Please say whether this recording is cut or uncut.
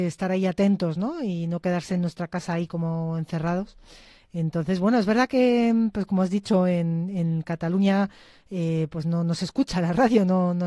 uncut